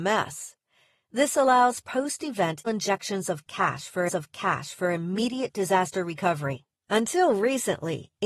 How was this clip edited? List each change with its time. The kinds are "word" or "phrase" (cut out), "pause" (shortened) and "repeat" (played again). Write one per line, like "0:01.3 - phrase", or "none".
0:02.7 - word
0:04.1 - repeat
0:06.8 - pause